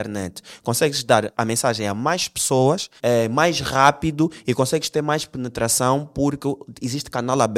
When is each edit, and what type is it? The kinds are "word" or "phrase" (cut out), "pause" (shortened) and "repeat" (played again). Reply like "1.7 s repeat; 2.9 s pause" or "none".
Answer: 1.3 s word; 3.0 s pause

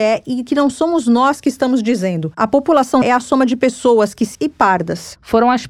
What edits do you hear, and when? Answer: 3.0 s word; 4.3 s phrase

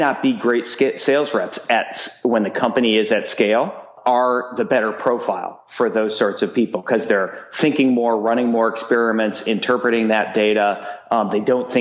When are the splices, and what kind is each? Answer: none

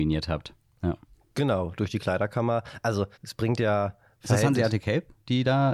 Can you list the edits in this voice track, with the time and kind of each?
1.1 s pause; 3.1 s pause

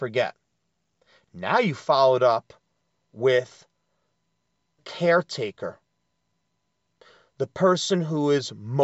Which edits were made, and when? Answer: 4.8 s word

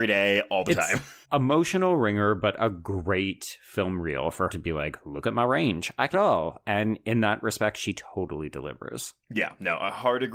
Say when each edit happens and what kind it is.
1.2 s word; 4.5 s word; 6.1 s phrase

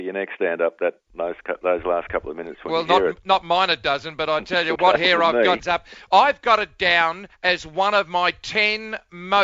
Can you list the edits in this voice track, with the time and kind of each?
4.8 s word; 5.6 s word

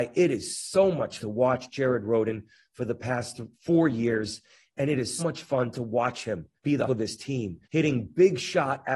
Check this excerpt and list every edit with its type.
1.2 s word; 3.5 s pause; 5.2 s word; 6.6 s pause; 6.9 s phrase; 7.6 s pause

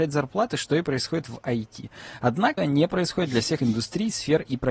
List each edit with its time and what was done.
2.6 s word; 3.6 s word

